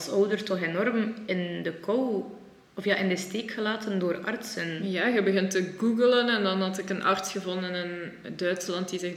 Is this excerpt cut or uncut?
uncut